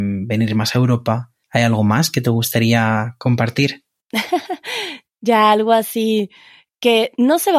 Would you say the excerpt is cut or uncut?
cut